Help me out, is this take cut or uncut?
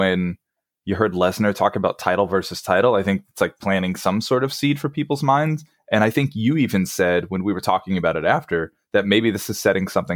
uncut